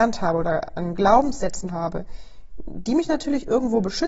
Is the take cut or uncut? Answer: cut